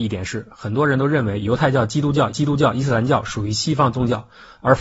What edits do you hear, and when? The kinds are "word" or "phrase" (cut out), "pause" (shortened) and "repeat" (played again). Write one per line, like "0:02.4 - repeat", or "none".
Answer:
0:02.3 - repeat